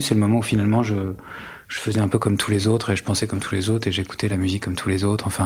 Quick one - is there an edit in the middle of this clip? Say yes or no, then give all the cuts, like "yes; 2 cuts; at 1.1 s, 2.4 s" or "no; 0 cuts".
no; 0 cuts